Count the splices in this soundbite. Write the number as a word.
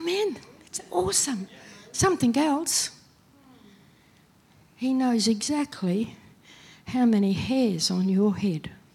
zero